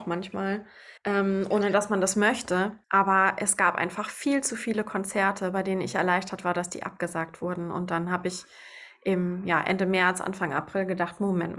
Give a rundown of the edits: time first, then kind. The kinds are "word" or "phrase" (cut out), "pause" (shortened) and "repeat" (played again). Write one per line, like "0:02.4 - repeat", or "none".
0:01.0 - pause
0:02.8 - pause